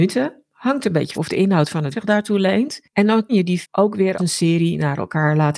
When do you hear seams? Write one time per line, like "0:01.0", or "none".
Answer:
0:01.1
0:01.9
0:03.3
0:03.6
0:04.2

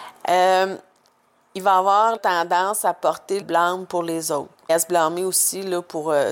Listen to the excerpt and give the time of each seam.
0:02.2
0:03.4
0:04.7

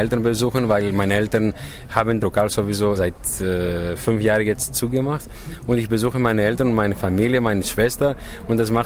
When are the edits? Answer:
0:02.2
0:03.0

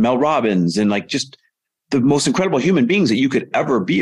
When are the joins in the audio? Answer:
none

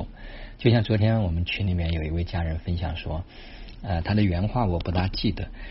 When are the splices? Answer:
none

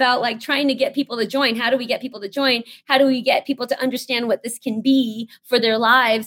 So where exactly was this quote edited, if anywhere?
none

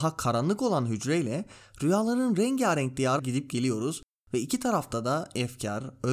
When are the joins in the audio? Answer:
0:03.2

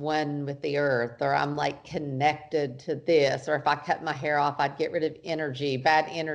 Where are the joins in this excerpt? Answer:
none

